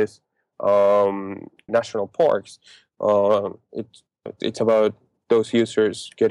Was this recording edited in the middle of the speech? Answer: yes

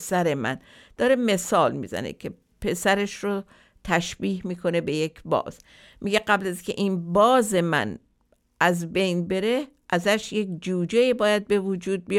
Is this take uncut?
yes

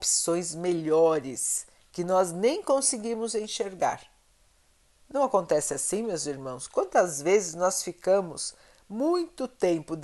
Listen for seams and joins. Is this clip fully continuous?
yes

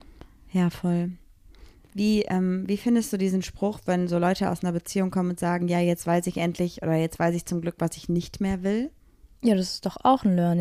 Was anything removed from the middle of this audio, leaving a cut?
no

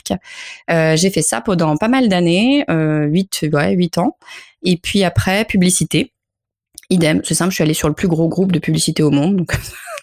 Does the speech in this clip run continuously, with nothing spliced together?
yes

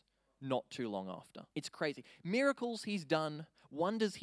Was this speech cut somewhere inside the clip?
yes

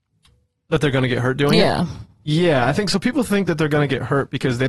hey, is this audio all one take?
yes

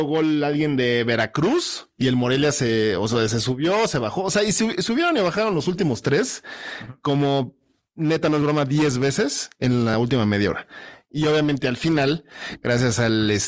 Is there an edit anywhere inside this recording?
no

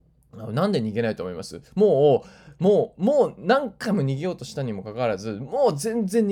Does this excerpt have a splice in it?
yes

